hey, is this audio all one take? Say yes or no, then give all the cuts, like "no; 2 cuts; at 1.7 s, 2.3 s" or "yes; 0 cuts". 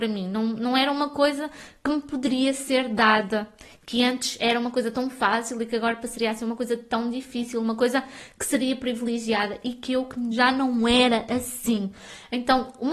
yes; 0 cuts